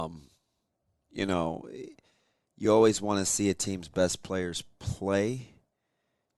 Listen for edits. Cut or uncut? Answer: uncut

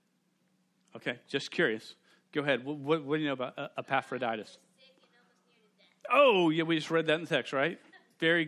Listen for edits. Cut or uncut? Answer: uncut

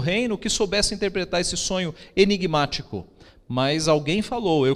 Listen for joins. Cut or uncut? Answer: uncut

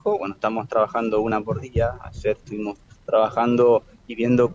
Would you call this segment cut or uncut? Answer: uncut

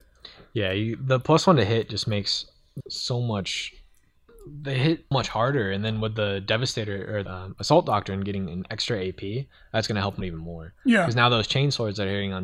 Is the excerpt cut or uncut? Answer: cut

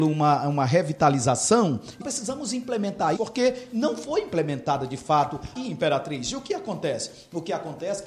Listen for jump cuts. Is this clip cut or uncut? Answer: cut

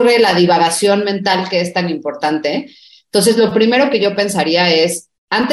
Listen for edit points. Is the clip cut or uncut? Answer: uncut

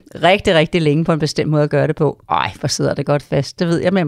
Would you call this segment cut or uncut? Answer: uncut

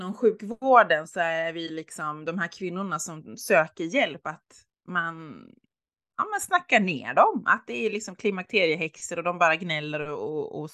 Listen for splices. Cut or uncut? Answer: uncut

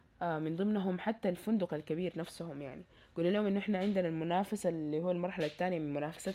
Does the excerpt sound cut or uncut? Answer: uncut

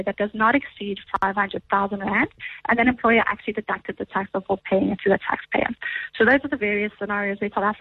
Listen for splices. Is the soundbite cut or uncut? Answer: uncut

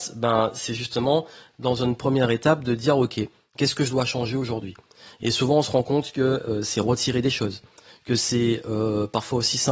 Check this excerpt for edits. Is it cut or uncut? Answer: uncut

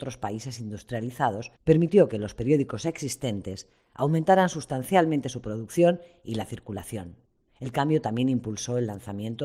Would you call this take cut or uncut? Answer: cut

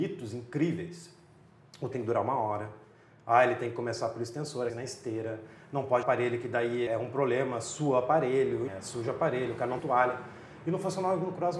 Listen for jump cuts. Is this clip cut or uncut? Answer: cut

